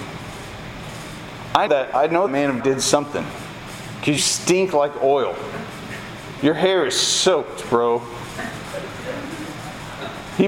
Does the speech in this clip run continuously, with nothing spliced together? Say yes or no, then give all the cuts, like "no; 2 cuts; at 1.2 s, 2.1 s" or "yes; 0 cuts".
no; 4 cuts; at 1.7 s, 2.3 s, 2.6 s, 4.2 s